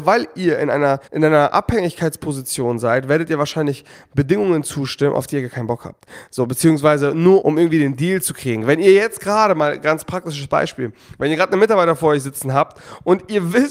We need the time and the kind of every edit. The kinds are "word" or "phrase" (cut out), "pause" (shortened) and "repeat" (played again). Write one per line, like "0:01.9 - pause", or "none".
0:01.1 - pause
0:07.4 - word